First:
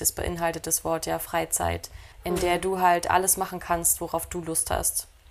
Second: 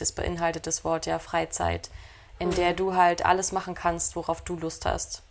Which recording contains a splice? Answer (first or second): first